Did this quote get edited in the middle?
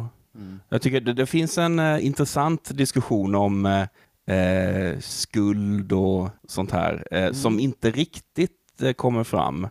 yes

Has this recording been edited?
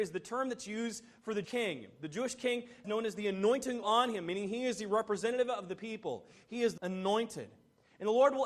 yes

